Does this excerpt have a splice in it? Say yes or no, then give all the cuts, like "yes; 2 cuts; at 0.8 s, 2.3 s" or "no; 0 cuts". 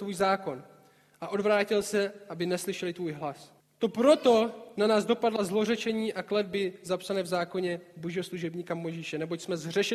yes; 1 cut; at 3.6 s